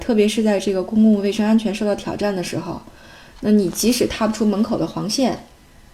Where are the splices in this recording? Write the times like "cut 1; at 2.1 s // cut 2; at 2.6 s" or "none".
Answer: none